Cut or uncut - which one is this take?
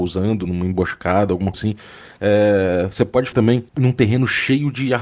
cut